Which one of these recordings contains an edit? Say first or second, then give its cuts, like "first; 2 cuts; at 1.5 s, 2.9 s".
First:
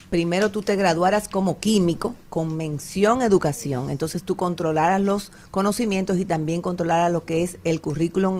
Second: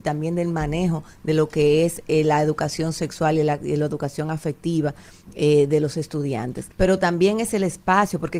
second; 1 cut; at 6.7 s